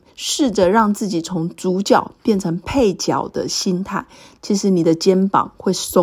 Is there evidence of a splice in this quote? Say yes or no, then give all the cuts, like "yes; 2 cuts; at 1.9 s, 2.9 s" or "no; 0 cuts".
no; 0 cuts